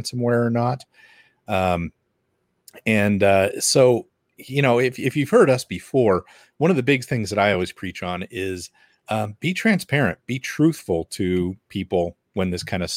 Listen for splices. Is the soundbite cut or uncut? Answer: uncut